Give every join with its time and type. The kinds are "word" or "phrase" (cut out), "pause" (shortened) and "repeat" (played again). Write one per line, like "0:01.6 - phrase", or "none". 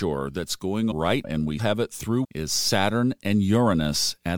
0:00.9 - word
0:01.2 - word
0:01.6 - word
0:02.2 - word